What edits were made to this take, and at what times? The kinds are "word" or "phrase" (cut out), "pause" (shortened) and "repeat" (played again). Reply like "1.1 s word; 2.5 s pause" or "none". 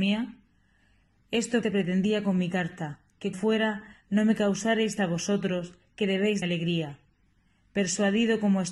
1.6 s word; 3.3 s word; 5.0 s word; 6.4 s word